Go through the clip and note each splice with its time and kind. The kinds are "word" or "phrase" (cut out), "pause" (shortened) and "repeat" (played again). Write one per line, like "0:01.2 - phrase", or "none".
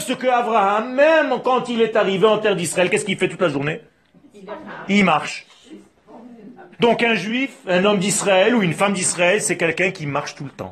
0:06.7 - pause